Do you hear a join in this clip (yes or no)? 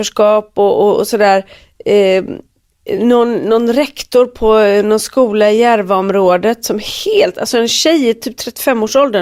no